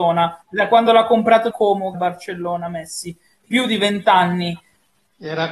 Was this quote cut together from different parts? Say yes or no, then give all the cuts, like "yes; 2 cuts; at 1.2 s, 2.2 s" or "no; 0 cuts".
yes; 3 cuts; at 1.5 s, 1.9 s, 3.4 s